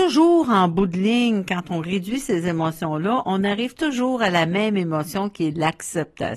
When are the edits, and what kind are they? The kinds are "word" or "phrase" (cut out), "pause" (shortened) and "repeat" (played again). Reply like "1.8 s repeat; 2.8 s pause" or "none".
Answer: none